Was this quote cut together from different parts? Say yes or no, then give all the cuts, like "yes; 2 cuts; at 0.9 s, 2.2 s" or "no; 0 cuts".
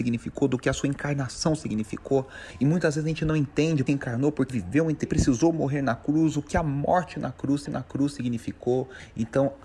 yes; 4 cuts; at 3.9 s, 4.5 s, 5.1 s, 7.7 s